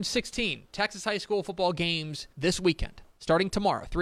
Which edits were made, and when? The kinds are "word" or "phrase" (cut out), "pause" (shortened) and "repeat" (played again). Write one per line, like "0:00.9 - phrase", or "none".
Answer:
0:02.3 - pause